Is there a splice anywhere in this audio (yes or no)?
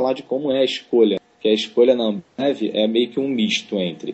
no